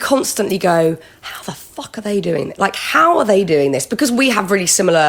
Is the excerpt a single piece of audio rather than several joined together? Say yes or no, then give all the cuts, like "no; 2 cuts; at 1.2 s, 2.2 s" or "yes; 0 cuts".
yes; 0 cuts